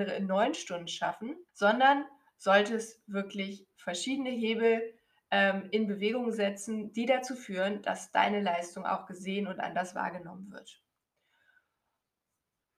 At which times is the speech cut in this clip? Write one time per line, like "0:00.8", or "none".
0:01.5